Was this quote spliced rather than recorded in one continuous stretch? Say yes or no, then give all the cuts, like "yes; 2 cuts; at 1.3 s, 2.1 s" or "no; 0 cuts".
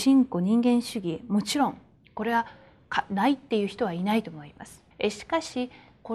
yes; 1 cut; at 4.9 s